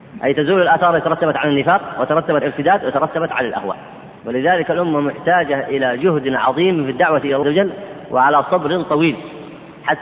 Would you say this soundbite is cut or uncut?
cut